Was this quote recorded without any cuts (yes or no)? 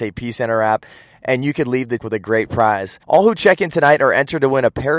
no